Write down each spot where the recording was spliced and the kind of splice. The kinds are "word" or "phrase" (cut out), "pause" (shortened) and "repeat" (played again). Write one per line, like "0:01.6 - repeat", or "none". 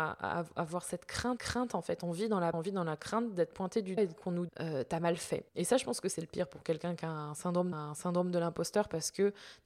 0:01.4 - repeat
0:02.5 - word
0:04.0 - word
0:04.5 - word
0:05.5 - pause
0:07.7 - repeat